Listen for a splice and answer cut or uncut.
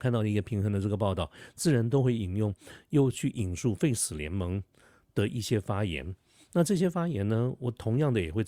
uncut